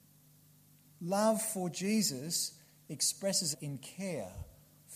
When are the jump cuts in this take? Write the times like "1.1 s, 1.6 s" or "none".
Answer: 3.5 s